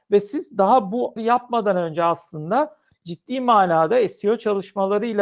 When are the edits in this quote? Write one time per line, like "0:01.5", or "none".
0:01.2